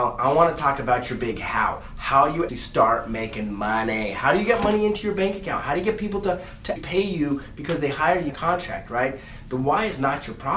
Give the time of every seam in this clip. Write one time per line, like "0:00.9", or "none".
0:02.5
0:06.8
0:08.3